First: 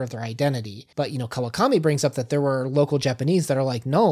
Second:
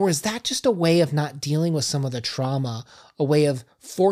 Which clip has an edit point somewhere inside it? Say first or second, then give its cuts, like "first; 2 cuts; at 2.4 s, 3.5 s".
first; 1 cut; at 0.9 s